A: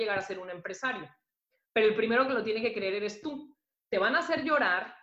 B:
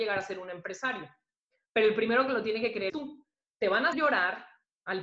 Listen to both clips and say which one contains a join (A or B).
B